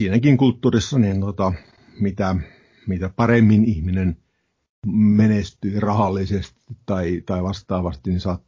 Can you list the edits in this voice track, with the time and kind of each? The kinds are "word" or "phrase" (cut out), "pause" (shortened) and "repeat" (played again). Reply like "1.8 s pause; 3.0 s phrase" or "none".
none